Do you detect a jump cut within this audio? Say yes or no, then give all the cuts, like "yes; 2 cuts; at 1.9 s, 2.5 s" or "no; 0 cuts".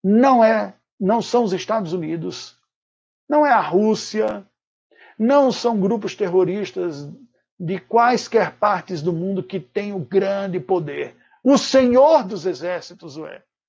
no; 0 cuts